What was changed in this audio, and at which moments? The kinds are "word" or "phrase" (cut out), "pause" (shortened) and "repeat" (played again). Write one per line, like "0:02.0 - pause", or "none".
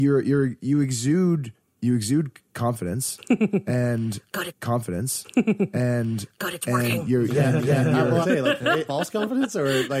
0:01.8 - word
0:04.5 - repeat
0:07.6 - repeat
0:08.2 - phrase
0:08.9 - phrase

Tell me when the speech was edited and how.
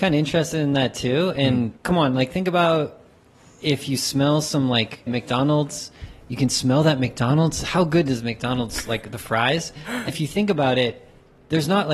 0:01.8 - pause
0:05.1 - phrase
0:10.1 - word

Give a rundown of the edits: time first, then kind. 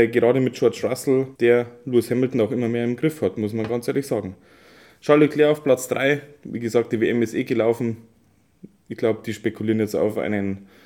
0:01.4 - pause

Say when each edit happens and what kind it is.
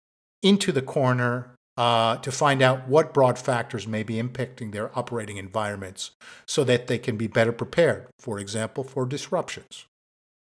0:01.6 - pause

